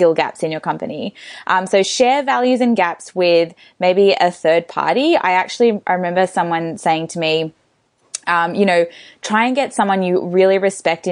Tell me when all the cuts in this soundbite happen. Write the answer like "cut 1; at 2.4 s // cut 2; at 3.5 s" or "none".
none